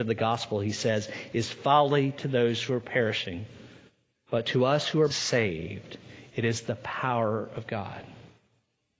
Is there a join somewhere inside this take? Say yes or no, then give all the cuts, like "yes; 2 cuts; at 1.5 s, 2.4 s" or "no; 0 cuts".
yes; 1 cut; at 5.1 s